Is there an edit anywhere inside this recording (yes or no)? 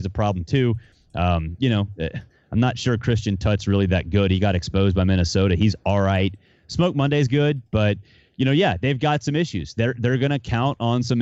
no